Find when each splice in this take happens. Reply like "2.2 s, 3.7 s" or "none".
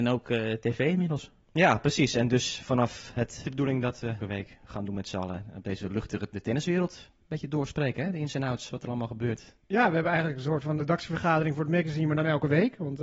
3.4 s, 4.2 s, 6.3 s, 10.8 s